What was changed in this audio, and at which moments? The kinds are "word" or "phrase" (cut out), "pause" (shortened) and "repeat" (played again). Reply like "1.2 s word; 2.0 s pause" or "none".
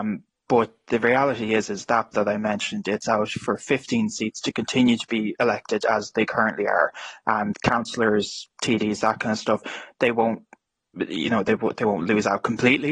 2.1 s word; 3.0 s word; 7.5 s word